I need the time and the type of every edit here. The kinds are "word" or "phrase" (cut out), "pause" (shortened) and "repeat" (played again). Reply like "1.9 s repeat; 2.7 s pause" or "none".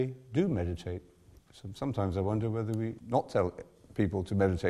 3.0 s word